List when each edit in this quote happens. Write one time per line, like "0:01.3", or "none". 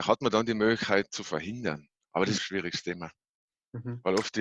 0:01.1
0:02.0
0:02.4